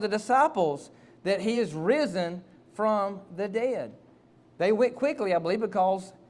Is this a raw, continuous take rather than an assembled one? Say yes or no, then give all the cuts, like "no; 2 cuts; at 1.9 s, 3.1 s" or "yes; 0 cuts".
yes; 0 cuts